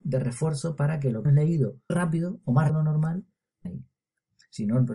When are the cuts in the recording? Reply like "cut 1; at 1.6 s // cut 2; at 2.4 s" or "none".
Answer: cut 1; at 1.2 s // cut 2; at 1.9 s // cut 3; at 2.7 s // cut 4; at 3.6 s